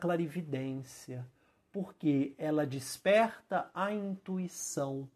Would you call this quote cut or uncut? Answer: uncut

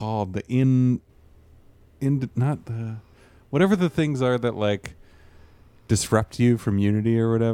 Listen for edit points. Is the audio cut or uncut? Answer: uncut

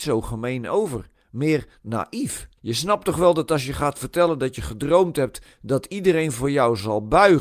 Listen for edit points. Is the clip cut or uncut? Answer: cut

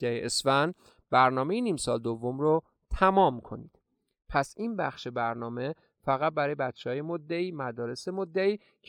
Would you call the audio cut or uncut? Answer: uncut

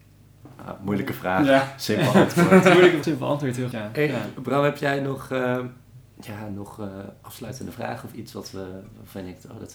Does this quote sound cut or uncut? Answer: cut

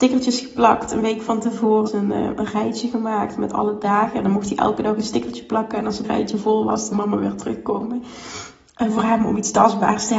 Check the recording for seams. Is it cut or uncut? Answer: cut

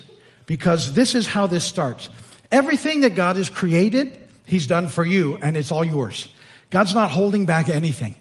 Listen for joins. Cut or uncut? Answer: uncut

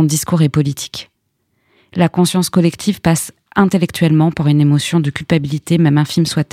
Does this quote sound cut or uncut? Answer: uncut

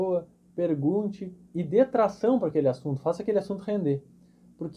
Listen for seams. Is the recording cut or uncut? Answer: uncut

